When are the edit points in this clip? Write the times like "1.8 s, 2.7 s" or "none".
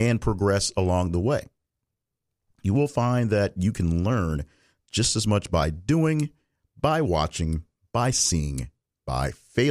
none